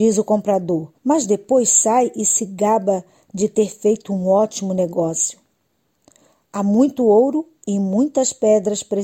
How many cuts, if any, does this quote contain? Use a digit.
1